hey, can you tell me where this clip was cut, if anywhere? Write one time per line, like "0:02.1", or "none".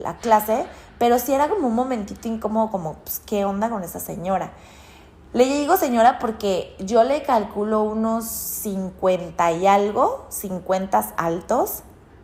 none